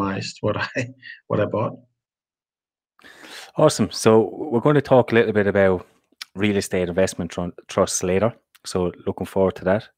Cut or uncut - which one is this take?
uncut